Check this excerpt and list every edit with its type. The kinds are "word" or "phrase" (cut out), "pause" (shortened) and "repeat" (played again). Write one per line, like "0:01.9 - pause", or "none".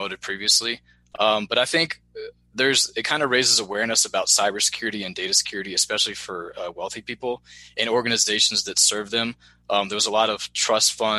none